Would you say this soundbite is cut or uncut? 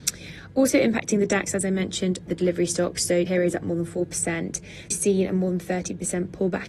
cut